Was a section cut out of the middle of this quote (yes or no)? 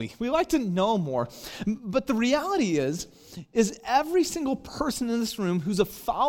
no